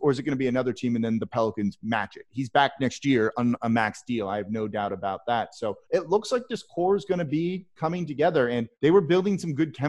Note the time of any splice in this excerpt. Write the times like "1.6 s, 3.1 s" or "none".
5.8 s, 8.7 s